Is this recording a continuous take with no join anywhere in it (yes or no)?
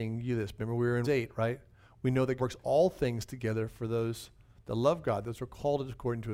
no